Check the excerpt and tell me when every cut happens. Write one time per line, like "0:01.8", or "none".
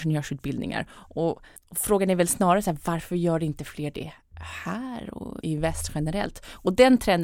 0:01.6
0:05.4

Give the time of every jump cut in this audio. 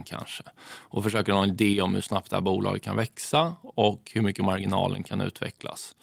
none

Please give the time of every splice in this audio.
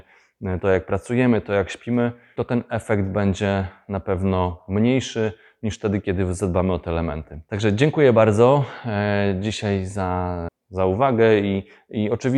none

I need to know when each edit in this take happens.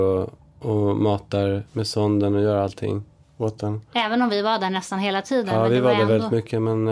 0:01.7

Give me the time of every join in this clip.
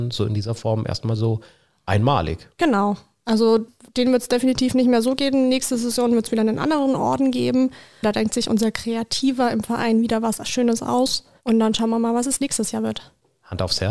none

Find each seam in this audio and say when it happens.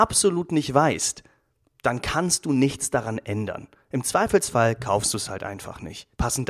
none

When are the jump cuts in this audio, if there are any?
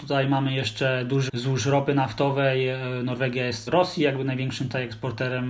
0:01.3
0:03.7

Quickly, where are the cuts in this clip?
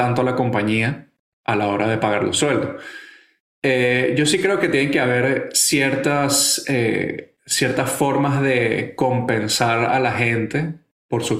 none

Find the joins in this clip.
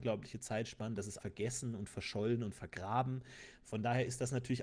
0:01.2

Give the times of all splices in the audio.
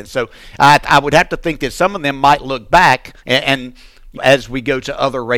0:04.2

